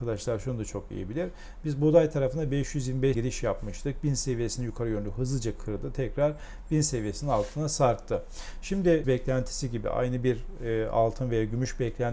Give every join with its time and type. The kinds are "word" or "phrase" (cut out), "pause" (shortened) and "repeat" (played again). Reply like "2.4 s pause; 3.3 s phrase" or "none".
3.1 s word; 9.0 s phrase